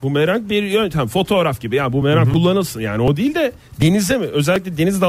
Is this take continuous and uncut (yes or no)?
yes